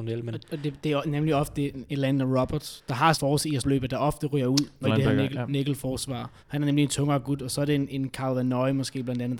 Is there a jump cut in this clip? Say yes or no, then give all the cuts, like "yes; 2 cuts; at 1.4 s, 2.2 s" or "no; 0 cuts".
yes; 4 cuts; at 3.1 s, 3.6 s, 4.8 s, 6.4 s